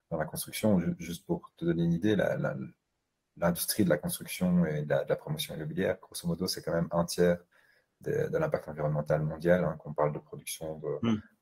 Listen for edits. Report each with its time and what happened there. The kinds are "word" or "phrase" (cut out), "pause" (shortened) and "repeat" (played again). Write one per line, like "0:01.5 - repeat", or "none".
none